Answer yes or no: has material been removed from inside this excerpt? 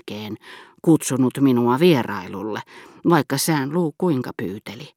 no